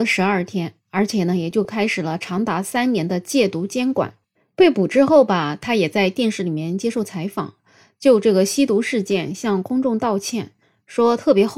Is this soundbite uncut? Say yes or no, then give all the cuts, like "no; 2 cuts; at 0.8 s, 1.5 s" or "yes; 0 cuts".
yes; 0 cuts